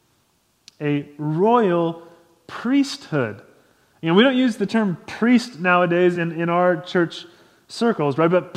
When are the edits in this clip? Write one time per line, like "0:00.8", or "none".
none